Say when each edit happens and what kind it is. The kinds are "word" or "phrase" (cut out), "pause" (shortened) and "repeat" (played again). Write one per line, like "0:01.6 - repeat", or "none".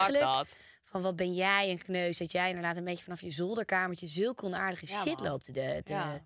none